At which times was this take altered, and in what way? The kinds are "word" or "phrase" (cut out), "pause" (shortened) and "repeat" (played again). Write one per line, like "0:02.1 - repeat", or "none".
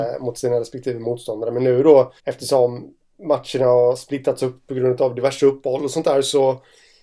0:02.2 - pause